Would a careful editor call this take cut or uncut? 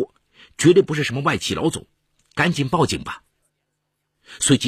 uncut